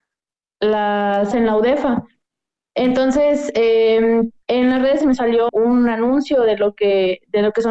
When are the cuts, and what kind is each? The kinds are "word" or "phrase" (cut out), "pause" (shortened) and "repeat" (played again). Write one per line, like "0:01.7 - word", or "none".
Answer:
0:01.3 - word
0:04.4 - word
0:05.0 - word
0:05.5 - word